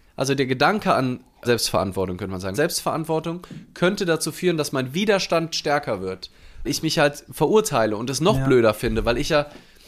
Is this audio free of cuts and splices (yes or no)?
no